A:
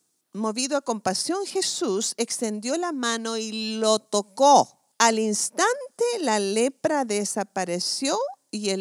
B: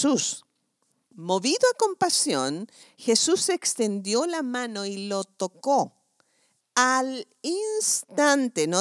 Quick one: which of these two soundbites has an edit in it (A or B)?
A